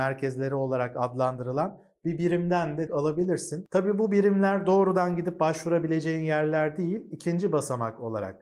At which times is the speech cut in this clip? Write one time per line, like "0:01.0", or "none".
0:02.9